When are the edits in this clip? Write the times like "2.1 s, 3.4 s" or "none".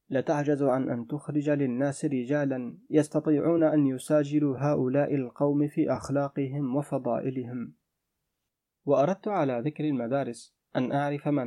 none